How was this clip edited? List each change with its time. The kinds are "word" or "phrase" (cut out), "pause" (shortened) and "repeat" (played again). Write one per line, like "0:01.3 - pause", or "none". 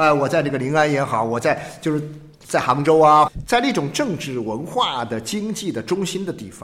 0:02.3 - pause
0:03.3 - phrase

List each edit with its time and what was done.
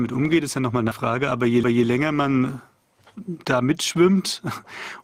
0:00.9 - word
0:01.6 - repeat

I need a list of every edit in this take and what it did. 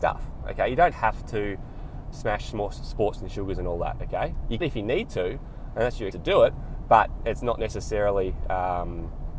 0:00.9 - word
0:02.0 - word
0:03.2 - word
0:04.6 - word
0:06.1 - word
0:07.2 - word

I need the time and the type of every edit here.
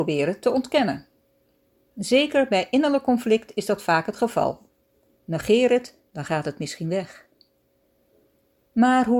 none

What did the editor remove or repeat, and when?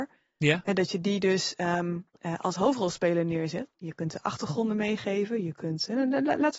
0:02.1 - pause

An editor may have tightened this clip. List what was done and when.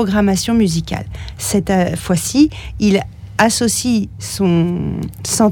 none

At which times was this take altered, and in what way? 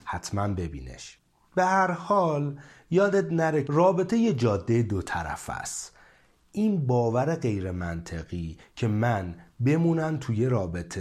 0:03.7 - word

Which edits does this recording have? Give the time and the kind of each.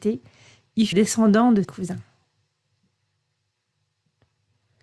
0:00.9 - word
0:01.6 - word

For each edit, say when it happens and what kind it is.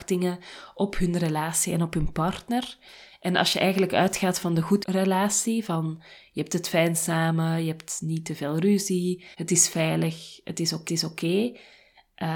0:04.8 - word
0:09.3 - pause
0:10.9 - repeat

